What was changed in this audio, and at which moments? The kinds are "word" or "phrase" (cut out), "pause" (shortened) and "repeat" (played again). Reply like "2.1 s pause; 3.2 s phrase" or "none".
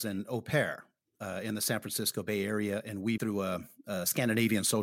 3.2 s phrase